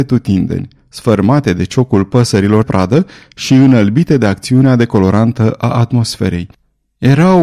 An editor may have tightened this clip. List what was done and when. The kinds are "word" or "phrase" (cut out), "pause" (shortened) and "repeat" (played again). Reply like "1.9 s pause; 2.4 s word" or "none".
2.6 s word

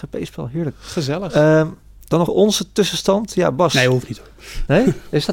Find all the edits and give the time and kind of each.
2.3 s word

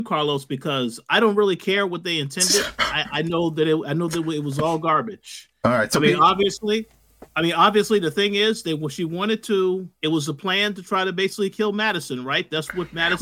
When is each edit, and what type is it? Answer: 7.3 s pause; 10.0 s pause

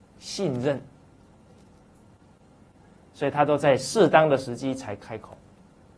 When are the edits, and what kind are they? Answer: none

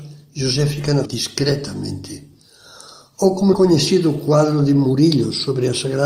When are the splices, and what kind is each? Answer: 1.1 s word; 3.5 s word

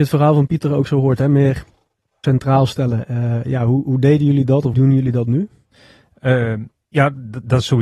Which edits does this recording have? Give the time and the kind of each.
2.2 s phrase; 3.8 s word; 4.7 s word

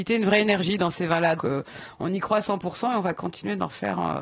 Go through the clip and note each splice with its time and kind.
1.4 s word

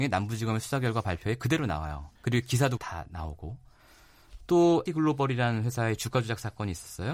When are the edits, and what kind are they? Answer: 2.2 s pause; 2.8 s word; 4.9 s word

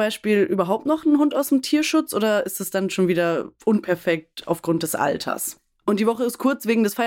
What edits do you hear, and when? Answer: none

